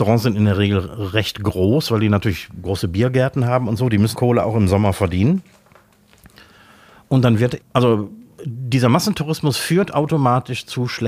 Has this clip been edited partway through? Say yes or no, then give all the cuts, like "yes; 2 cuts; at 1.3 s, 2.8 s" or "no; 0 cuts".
yes; 2 cuts; at 4.1 s, 7.6 s